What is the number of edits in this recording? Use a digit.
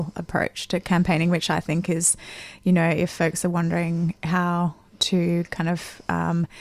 0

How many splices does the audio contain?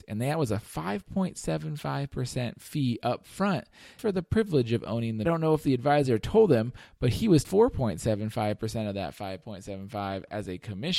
3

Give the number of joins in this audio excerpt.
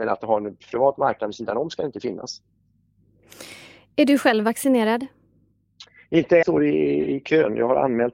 1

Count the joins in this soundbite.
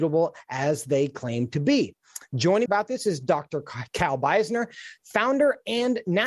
1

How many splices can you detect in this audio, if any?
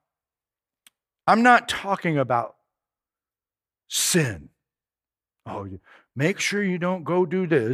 0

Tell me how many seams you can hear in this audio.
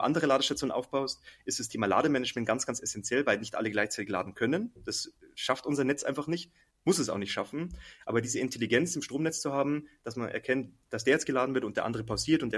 0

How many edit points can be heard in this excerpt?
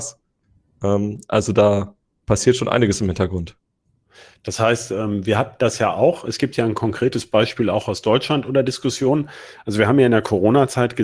0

